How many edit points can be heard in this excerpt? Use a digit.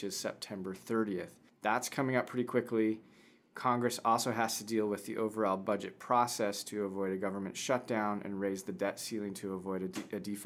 1